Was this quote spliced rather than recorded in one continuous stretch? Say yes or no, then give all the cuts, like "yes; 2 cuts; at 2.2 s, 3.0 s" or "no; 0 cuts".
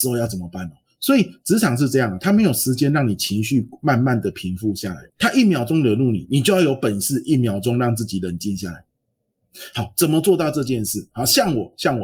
yes; 1 cut; at 5.1 s